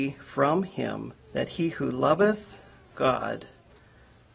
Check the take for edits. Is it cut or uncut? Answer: cut